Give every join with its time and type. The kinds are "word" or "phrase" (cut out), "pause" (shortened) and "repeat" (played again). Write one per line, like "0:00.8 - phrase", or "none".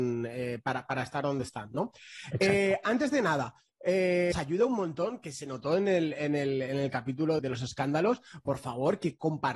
0:04.3 - word
0:07.4 - word